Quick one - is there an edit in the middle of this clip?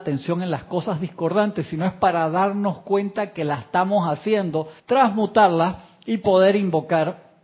yes; 1 cut; at 4.8 s

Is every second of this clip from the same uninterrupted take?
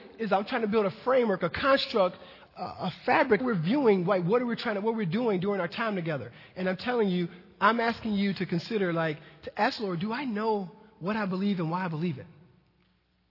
no; 2 cuts; at 2.5 s, 3.4 s

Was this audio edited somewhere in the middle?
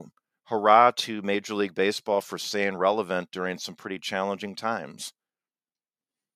no; 0 cuts

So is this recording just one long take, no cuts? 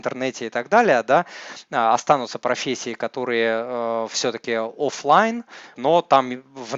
no; 1 cut; at 5.7 s

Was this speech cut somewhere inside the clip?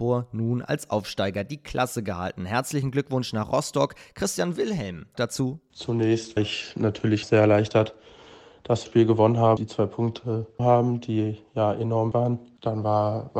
yes; 7 cuts; at 5.1 s, 6.4 s, 7.2 s, 8.9 s, 9.6 s, 10.6 s, 12.1 s

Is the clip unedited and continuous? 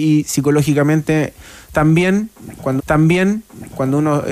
no; 1 cut; at 2.8 s

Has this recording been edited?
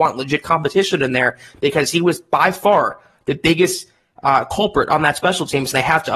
no; 0 cuts

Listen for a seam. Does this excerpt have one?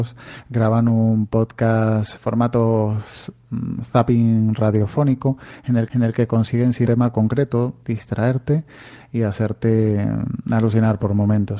yes; 3 cuts; at 2.2 s, 5.9 s, 6.9 s

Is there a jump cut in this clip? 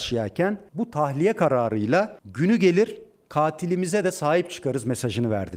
no; 0 cuts

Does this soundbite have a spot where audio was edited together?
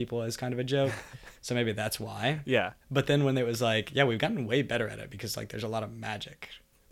yes; 1 cut; at 2.8 s

